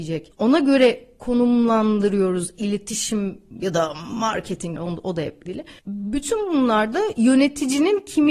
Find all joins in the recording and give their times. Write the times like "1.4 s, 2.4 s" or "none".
4.8 s, 5.5 s